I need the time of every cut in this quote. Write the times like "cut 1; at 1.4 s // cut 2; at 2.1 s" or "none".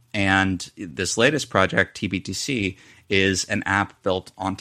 none